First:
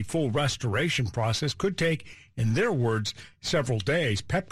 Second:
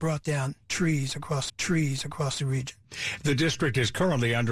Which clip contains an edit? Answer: second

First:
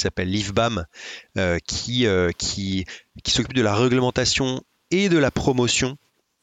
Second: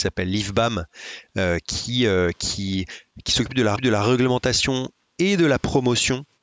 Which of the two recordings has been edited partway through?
second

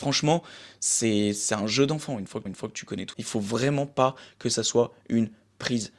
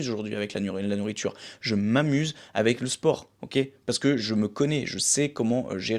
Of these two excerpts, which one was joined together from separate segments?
first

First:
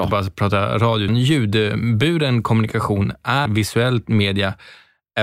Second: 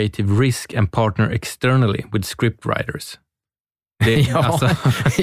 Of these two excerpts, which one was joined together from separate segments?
first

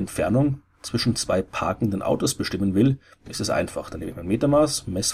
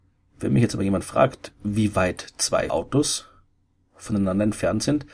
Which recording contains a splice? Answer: second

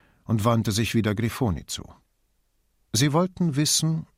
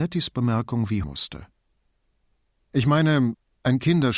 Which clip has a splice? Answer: second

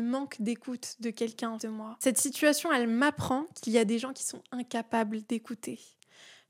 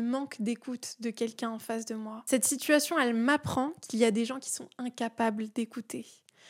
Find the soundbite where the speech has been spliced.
first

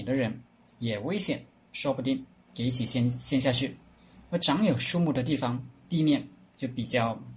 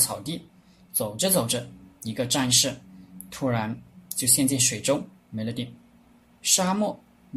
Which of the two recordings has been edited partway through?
second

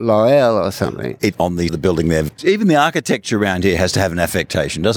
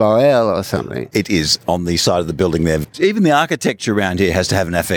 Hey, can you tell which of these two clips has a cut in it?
first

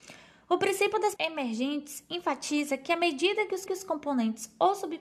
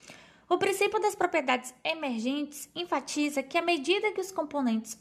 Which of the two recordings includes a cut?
first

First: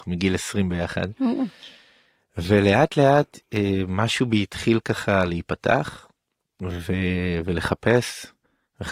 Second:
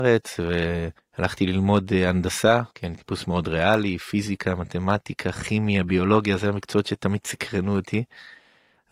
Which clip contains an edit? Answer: second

